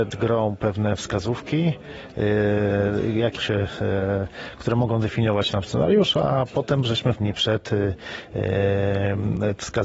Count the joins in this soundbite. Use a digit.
3